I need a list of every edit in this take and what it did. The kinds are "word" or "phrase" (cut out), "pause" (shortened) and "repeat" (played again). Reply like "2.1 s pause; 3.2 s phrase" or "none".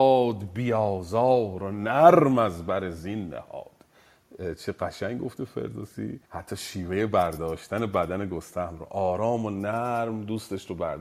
6.2 s pause